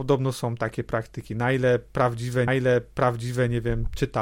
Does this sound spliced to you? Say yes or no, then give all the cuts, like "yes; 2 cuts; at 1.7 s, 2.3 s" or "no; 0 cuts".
yes; 1 cut; at 2.5 s